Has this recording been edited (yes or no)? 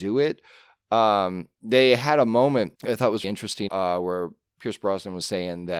yes